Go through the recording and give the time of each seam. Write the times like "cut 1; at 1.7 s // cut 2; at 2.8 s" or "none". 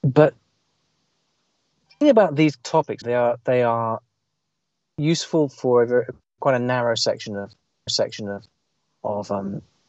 cut 1; at 2.0 s // cut 2; at 3.0 s // cut 3; at 6.2 s // cut 4; at 7.9 s